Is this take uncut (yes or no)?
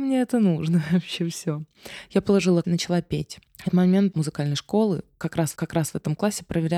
no